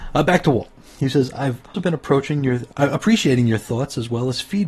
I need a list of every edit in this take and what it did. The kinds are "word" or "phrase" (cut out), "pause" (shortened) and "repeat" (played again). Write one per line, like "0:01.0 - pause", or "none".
0:01.7 - word